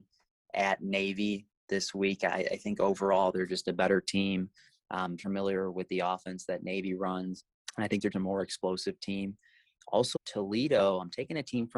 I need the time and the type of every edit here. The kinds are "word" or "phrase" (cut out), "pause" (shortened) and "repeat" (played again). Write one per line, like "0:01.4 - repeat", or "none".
0:05.2 - word
0:08.1 - word
0:10.2 - word